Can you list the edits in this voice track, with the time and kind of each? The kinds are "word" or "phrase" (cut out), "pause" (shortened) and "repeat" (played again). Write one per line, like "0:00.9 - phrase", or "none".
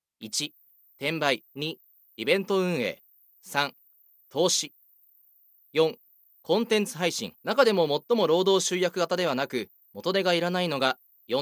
0:01.5 - pause
0:03.3 - pause
0:07.4 - pause